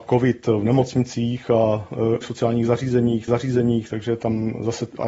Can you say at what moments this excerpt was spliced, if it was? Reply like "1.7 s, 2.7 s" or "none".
2.2 s, 3.3 s